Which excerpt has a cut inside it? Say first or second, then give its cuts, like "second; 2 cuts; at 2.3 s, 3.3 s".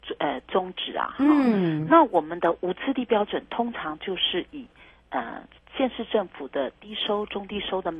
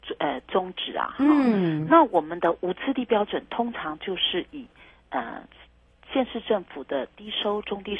first; 1 cut; at 5.6 s